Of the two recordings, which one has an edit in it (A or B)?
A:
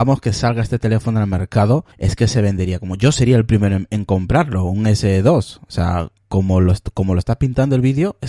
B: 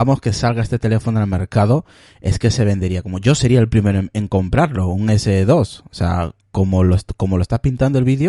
A